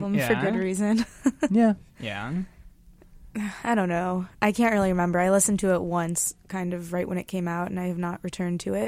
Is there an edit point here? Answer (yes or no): yes